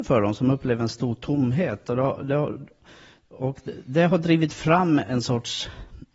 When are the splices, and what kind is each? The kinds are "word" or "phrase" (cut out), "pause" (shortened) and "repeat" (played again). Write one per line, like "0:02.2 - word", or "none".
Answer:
none